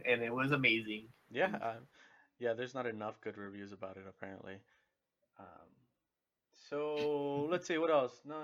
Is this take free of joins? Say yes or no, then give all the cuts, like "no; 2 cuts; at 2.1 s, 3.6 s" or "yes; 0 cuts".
yes; 0 cuts